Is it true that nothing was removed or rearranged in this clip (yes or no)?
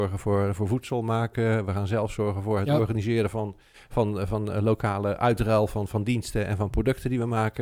yes